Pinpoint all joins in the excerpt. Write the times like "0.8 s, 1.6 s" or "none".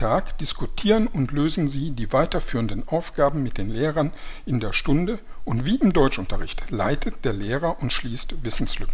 none